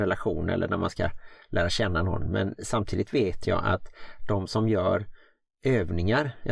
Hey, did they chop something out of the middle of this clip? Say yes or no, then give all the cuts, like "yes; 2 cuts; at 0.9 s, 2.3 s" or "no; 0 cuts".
no; 0 cuts